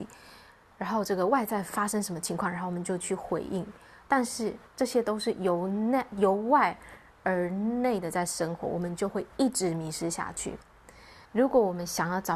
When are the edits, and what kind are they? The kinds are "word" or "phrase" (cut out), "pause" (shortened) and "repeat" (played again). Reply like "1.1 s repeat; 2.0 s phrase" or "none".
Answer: 11.2 s pause